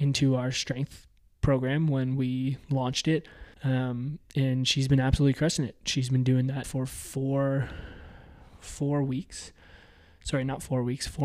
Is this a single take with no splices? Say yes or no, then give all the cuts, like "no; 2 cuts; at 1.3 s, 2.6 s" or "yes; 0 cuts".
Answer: no; 2 cuts; at 3.5 s, 6.6 s